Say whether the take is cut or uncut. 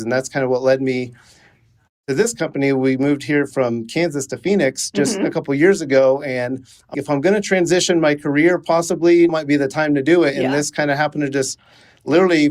cut